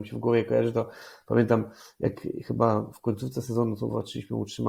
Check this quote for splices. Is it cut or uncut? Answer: uncut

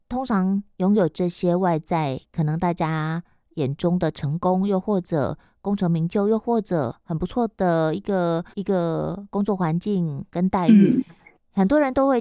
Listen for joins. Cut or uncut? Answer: cut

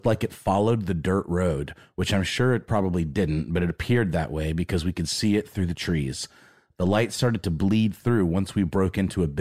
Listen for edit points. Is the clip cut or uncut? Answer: uncut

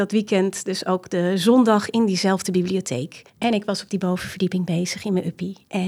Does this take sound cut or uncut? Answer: cut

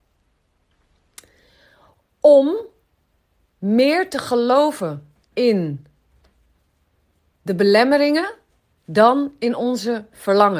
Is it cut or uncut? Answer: uncut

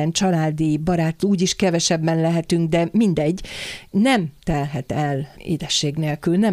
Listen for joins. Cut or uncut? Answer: cut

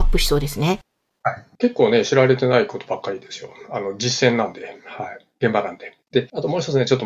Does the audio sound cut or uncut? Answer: cut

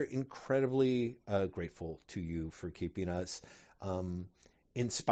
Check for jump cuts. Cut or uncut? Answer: uncut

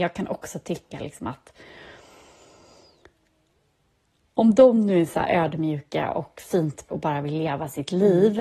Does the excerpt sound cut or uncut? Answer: cut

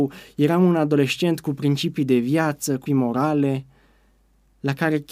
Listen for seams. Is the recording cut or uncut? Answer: cut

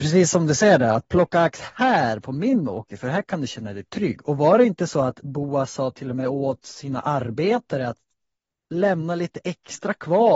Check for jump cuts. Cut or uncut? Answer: uncut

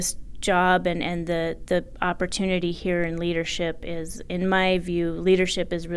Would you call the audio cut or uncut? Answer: uncut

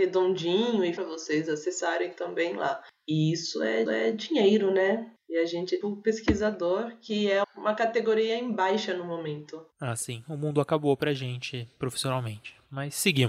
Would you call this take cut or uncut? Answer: cut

